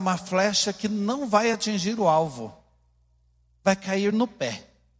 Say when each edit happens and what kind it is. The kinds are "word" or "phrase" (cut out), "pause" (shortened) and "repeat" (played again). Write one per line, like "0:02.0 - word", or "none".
none